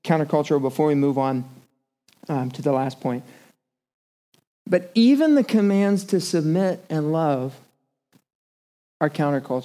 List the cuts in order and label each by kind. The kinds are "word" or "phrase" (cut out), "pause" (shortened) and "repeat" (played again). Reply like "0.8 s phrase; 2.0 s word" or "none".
none